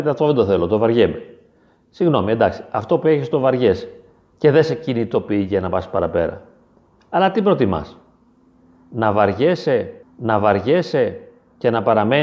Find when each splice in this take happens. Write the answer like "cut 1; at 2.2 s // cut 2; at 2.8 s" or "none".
cut 1; at 10.0 s